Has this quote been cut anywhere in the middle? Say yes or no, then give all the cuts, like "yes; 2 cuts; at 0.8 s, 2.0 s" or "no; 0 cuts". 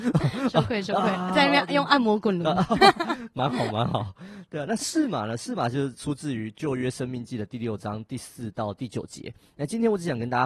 no; 0 cuts